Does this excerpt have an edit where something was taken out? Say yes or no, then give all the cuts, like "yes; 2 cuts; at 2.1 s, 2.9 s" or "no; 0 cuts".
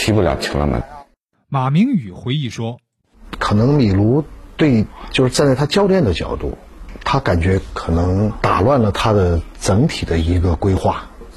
no; 0 cuts